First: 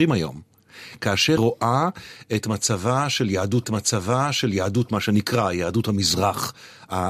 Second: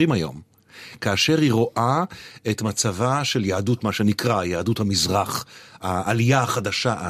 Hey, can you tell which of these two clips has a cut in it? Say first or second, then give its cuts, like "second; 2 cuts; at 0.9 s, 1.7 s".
first; 2 cuts; at 1.4 s, 3.6 s